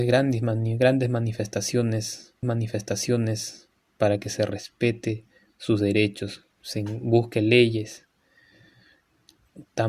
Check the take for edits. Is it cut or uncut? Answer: cut